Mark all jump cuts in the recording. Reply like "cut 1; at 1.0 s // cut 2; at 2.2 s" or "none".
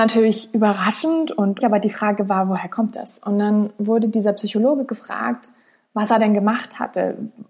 cut 1; at 1.6 s